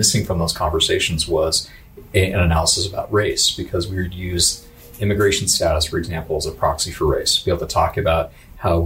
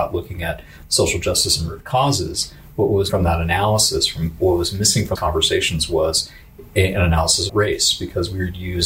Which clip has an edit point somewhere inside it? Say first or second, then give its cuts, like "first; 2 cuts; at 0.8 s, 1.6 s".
second; 3 cuts; at 3.1 s, 5.2 s, 7.5 s